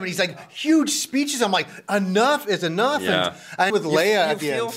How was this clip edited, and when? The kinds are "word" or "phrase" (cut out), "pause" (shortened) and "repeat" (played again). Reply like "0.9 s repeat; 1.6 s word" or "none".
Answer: 3.7 s phrase